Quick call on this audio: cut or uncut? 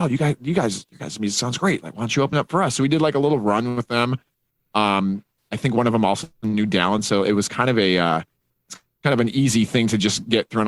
uncut